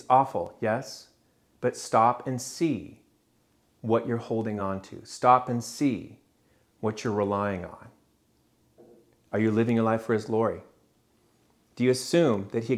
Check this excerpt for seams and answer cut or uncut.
uncut